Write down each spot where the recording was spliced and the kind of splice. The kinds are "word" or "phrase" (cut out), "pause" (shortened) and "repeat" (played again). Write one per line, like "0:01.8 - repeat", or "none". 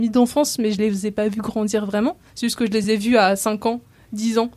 none